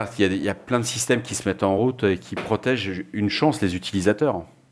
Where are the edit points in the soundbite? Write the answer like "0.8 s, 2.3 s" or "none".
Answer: none

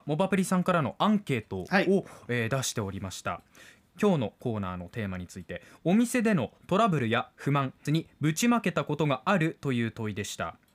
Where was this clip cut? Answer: 7.9 s

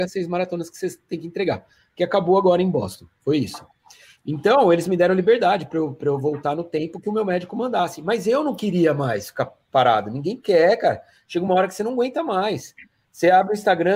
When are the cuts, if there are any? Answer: none

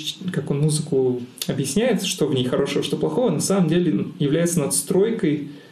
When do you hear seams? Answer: none

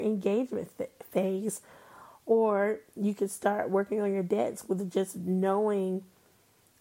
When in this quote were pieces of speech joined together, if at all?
none

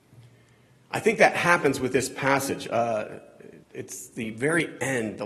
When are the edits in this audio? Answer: 3.6 s

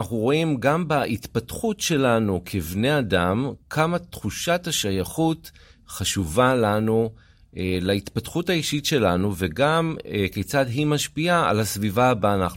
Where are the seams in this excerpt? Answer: none

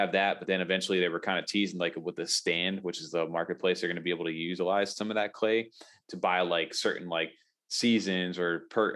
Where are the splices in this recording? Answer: none

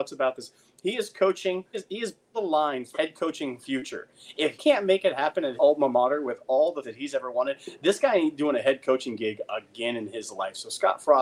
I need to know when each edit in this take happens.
1.7 s, 2.3 s, 2.9 s, 4.5 s, 5.6 s, 6.8 s

